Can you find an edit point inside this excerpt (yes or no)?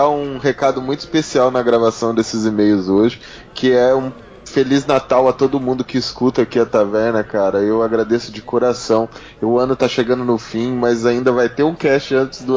no